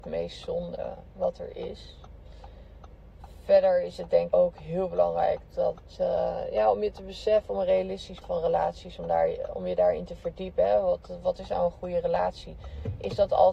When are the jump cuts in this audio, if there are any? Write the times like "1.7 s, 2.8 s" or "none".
4.3 s, 8.2 s

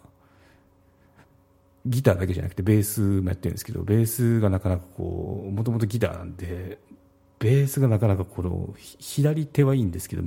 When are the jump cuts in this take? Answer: none

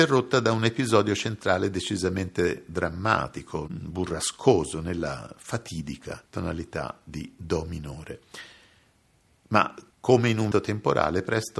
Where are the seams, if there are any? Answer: 6.3 s, 9.9 s, 10.5 s

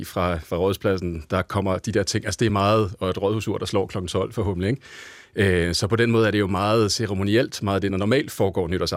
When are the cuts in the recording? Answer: none

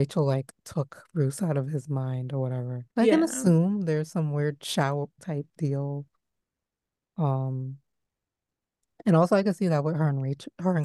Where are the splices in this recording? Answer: 2.9 s, 5.2 s

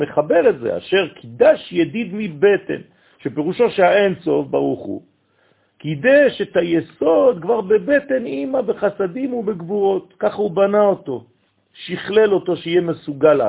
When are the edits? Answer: none

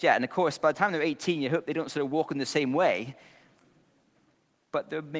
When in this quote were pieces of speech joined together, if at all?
none

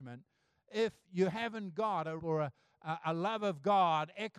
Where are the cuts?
1.0 s, 2.2 s

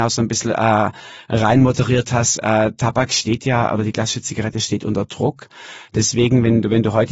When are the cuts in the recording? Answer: none

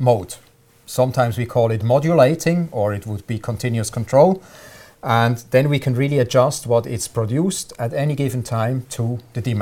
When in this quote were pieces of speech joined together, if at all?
none

